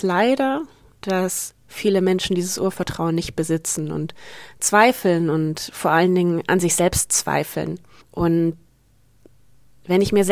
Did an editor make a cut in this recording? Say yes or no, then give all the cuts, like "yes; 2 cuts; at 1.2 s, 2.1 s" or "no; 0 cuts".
yes; 1 cut; at 8.0 s